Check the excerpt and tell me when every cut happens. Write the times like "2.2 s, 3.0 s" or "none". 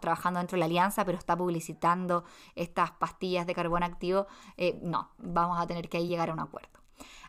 none